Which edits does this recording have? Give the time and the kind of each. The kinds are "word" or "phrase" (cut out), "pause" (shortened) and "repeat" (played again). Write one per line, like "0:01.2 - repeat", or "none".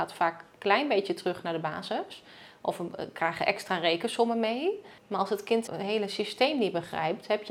0:05.0 - pause
0:05.7 - word